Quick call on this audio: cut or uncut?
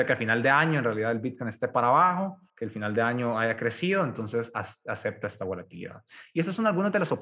cut